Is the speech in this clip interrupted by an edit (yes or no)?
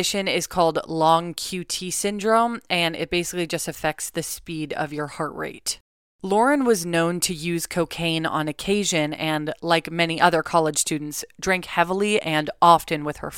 no